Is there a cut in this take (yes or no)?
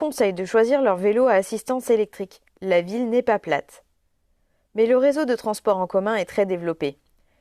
no